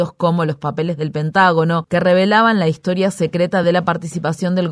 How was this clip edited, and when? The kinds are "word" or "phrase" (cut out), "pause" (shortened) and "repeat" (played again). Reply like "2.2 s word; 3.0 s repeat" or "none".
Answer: none